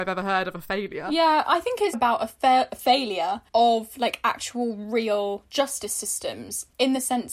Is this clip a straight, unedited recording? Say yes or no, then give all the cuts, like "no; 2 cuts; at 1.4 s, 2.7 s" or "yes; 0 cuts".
no; 2 cuts; at 1.9 s, 3.5 s